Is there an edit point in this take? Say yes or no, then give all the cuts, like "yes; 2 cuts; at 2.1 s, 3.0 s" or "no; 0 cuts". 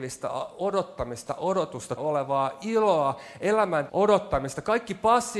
yes; 3 cuts; at 1.3 s, 2.0 s, 3.9 s